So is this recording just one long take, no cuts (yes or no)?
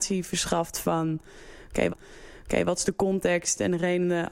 no